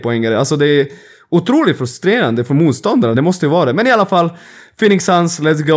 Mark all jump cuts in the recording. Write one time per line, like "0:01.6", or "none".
none